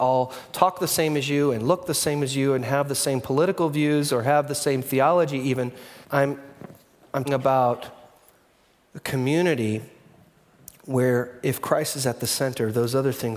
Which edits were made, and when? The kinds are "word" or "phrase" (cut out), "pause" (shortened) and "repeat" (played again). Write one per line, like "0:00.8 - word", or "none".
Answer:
0:06.0 - pause
0:07.2 - word

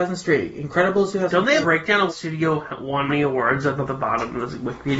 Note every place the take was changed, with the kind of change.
0:01.6 - word
0:02.1 - word
0:03.1 - word
0:03.9 - word

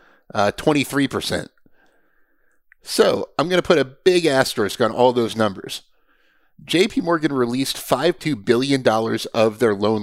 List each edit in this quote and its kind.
0:08.2 - word

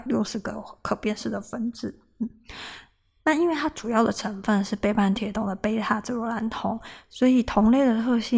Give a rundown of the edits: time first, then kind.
none

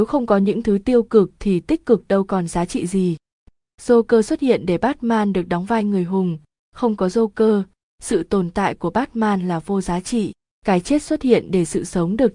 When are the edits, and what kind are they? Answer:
none

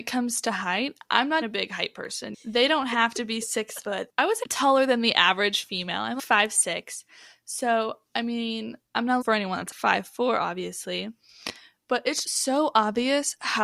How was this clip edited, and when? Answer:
0:01.4 - word
0:04.4 - word
0:09.2 - word
0:12.2 - word

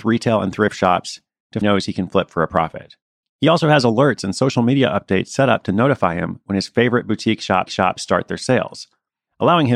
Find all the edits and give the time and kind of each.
0:01.6 - phrase
0:07.7 - repeat

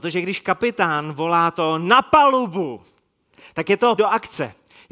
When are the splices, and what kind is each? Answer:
0:04.0 - word

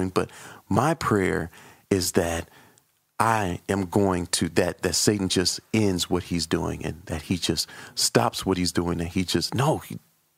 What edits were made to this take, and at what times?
none

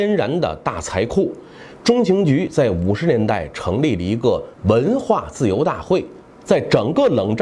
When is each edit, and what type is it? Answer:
0:04.5 - pause

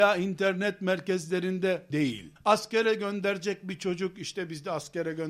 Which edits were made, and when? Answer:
0:01.9 - phrase
0:02.4 - pause

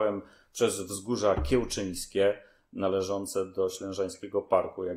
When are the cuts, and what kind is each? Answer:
none

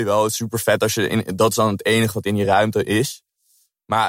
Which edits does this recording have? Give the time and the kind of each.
none

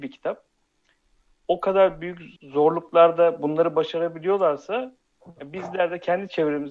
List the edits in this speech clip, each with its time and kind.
0:02.4 - pause

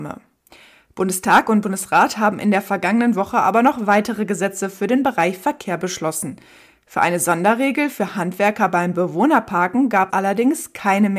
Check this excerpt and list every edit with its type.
0:10.1 - word

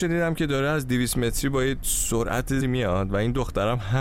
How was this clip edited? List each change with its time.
0:02.6 - word

